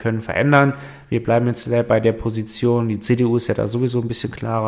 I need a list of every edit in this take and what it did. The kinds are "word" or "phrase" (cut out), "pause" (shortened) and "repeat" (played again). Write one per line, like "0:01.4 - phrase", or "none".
none